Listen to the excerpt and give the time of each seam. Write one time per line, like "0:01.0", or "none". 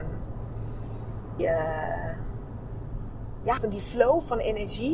0:01.4
0:03.6